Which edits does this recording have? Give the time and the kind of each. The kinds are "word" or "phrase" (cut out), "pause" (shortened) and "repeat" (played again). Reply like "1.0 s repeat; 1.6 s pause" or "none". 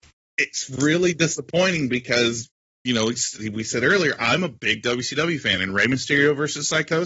none